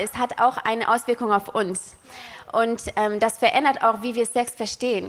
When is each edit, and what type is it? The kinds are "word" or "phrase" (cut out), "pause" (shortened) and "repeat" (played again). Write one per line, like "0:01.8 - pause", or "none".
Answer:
none